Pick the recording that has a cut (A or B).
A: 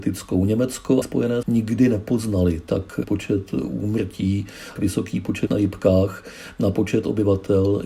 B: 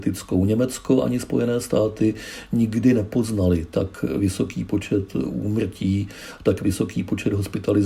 A